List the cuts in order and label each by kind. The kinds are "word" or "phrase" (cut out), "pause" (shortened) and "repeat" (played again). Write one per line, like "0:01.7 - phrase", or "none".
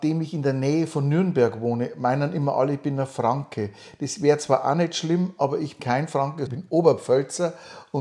0:05.8 - word
0:06.5 - word